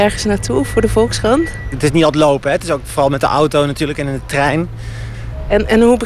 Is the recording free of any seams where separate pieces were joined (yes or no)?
yes